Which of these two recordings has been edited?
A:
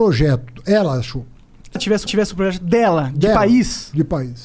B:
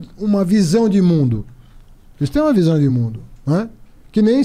A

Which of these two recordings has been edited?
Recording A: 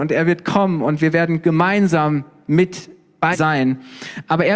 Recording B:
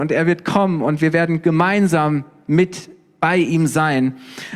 A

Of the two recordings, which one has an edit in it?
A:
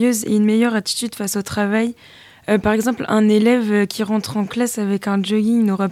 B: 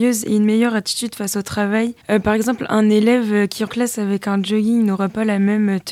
B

